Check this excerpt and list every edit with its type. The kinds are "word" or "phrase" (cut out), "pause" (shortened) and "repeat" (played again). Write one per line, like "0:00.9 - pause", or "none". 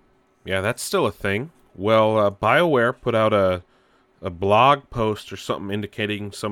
none